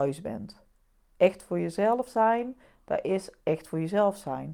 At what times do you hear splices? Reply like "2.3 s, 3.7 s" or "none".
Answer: none